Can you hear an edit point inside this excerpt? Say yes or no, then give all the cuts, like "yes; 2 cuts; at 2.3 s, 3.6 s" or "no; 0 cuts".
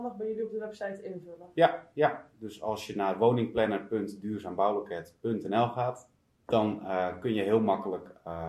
yes; 1 cut; at 6.2 s